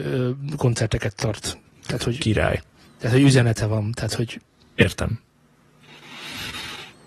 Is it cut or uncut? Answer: cut